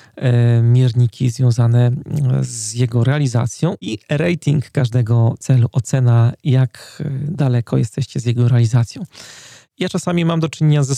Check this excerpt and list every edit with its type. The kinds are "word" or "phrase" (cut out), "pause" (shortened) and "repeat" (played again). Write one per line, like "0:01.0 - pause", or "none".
none

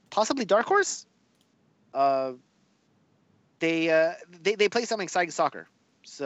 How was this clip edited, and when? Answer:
none

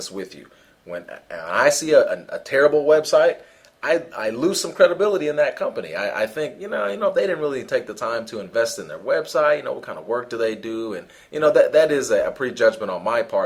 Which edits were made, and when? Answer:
none

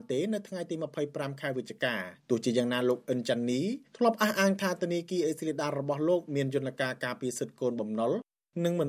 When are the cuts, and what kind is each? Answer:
0:02.2 - pause
0:03.9 - pause

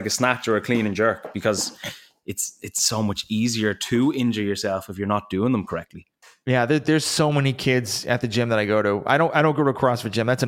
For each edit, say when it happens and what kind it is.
none

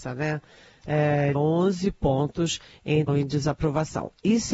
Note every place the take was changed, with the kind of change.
0:01.4 - word
0:03.1 - word

